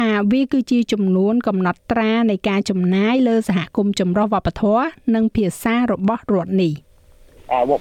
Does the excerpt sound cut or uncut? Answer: uncut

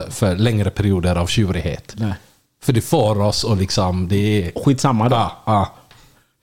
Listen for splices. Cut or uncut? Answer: uncut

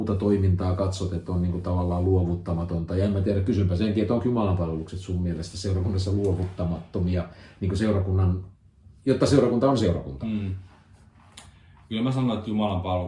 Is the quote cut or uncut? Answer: uncut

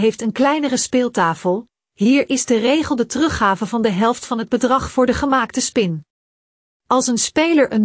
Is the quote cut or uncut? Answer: uncut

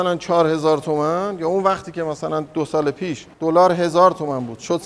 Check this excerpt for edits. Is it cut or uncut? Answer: cut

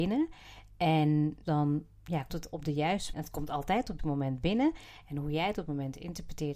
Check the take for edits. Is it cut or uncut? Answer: cut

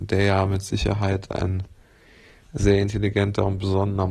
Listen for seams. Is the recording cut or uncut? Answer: uncut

